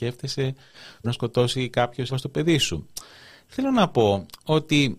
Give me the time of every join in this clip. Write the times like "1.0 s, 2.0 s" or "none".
1.0 s, 2.1 s